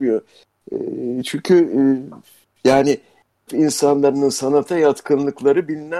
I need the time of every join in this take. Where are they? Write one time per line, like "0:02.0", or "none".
0:03.5